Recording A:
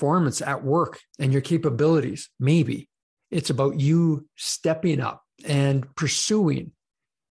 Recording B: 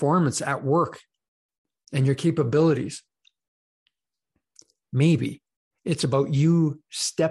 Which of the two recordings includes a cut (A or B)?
A